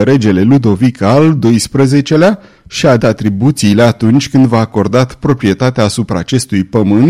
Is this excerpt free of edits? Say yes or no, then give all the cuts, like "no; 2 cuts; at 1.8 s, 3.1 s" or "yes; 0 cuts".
no; 1 cut; at 3.0 s